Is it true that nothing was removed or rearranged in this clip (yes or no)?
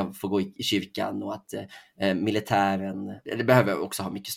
yes